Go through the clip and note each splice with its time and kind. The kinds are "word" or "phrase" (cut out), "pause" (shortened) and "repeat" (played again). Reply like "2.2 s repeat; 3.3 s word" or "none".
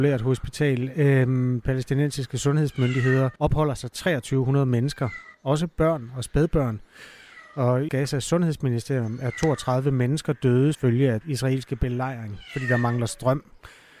1.6 s phrase; 3.4 s pause; 5.3 s pause; 7.9 s phrase; 10.7 s word; 11.2 s word